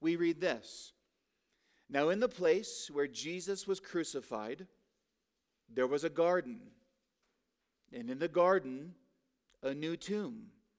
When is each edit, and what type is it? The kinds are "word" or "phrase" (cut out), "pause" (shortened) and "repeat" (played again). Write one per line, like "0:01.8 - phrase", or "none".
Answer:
none

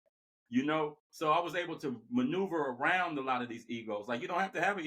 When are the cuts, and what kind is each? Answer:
0:01.0 - pause

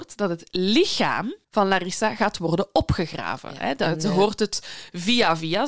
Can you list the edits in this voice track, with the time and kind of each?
0:01.4 - pause

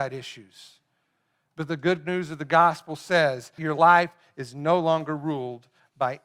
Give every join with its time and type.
0:03.6 - word

